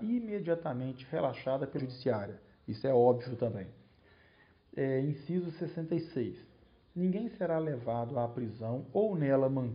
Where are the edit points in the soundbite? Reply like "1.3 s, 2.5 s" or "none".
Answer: 1.8 s